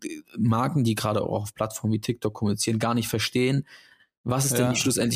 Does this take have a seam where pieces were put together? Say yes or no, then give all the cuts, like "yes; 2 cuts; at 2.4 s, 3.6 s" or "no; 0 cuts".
no; 0 cuts